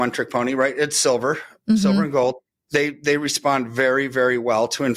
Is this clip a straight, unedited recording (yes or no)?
yes